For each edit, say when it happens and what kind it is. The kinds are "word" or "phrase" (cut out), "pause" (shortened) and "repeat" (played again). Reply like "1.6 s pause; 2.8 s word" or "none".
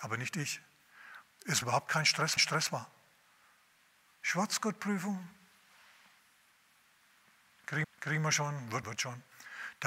1.6 s phrase; 2.4 s repeat; 7.8 s repeat; 8.8 s word